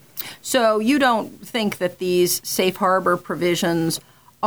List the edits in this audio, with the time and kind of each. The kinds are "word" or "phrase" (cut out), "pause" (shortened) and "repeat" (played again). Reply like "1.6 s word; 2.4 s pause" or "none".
none